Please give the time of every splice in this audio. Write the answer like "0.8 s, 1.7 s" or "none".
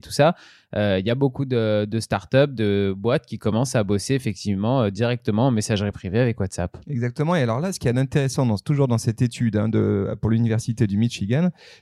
none